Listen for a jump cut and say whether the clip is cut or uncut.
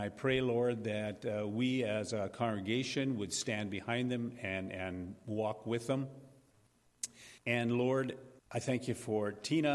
cut